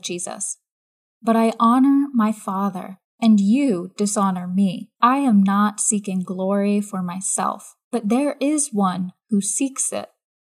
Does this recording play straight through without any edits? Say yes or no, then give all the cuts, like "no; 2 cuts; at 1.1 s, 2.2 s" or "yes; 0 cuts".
no; 3 cuts; at 3.0 s, 5.0 s, 7.8 s